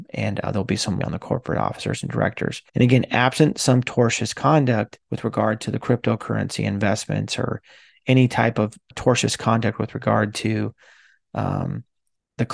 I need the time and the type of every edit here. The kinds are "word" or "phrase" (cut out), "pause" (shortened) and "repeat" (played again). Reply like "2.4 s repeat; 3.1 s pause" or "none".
1.0 s word; 2.7 s pause; 5.0 s pause; 8.9 s word

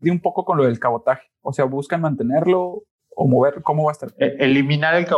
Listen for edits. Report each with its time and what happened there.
none

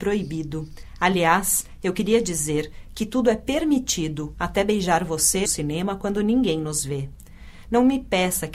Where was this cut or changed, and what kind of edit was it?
5.4 s phrase

